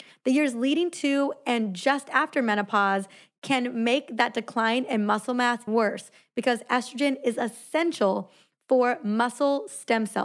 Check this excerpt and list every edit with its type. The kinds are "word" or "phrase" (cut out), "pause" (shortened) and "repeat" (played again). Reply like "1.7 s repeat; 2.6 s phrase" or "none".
5.7 s word